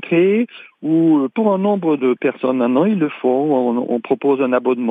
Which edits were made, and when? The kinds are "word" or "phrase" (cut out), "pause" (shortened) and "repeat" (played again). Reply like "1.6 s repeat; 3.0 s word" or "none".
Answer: 1.3 s word; 2.0 s word